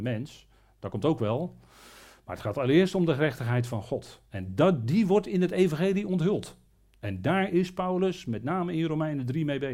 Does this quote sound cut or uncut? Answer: uncut